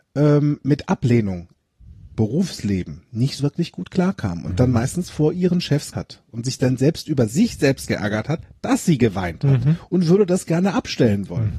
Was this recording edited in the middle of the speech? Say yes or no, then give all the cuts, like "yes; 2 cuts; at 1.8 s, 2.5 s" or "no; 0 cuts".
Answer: yes; 3 cuts; at 2.1 s, 3.4 s, 5.9 s